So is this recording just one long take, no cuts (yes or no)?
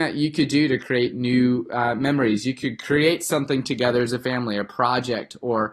yes